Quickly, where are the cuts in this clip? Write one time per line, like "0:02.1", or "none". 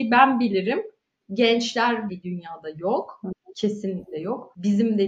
0:02.1